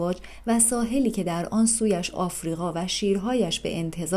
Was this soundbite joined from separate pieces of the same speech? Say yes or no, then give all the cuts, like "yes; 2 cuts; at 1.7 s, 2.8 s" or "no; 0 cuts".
no; 0 cuts